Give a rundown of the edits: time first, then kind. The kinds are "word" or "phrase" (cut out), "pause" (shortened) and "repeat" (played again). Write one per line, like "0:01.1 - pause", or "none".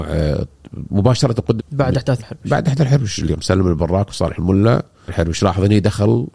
0:01.6 - word
0:02.2 - word
0:03.4 - word
0:05.1 - word